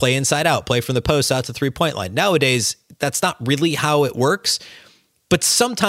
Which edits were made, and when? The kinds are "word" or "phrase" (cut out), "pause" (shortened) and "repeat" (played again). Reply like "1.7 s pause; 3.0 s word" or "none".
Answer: none